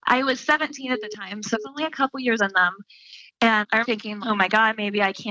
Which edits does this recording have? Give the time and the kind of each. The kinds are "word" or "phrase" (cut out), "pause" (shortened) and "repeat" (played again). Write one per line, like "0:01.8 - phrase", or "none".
0:01.5 - word
0:02.4 - word
0:03.8 - word
0:04.2 - word